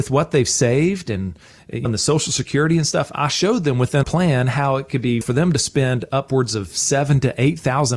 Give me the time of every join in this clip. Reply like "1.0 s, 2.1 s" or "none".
1.8 s, 4.0 s, 5.2 s